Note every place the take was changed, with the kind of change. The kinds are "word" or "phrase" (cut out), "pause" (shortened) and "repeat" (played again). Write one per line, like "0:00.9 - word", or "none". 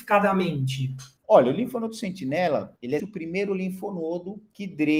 0:01.2 - pause
0:03.0 - word